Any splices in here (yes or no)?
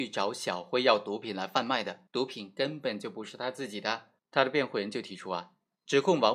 yes